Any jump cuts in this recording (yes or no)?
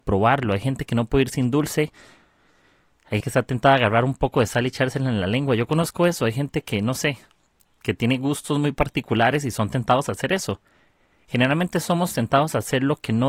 yes